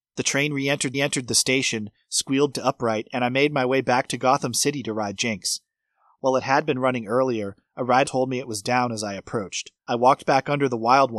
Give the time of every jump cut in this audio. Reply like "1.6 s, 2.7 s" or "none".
0.9 s, 2.5 s, 5.2 s, 8.0 s, 9.8 s